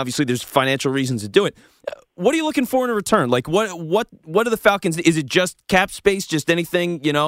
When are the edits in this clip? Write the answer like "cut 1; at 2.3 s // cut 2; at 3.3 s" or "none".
none